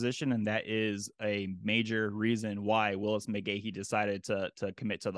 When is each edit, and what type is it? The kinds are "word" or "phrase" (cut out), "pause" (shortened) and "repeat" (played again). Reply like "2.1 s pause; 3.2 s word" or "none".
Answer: none